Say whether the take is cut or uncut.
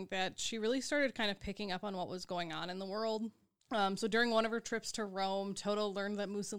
uncut